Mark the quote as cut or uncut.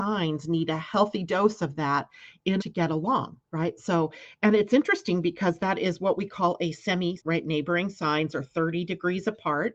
cut